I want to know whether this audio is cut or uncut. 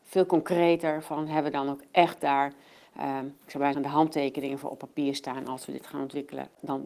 cut